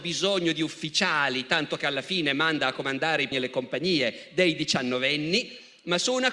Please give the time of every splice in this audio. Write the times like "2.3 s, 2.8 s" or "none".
3.3 s